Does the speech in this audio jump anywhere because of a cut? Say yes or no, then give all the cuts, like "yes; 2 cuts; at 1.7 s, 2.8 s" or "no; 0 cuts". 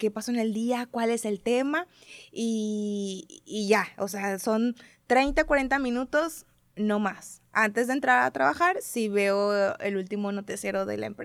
no; 0 cuts